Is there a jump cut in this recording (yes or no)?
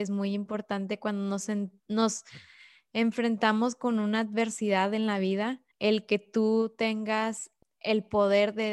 yes